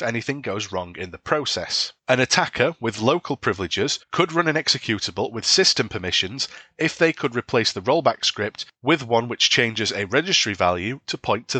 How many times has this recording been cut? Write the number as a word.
two